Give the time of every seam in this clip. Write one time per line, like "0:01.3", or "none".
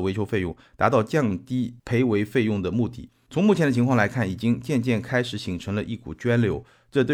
0:01.8